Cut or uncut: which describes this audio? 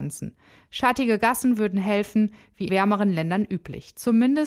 cut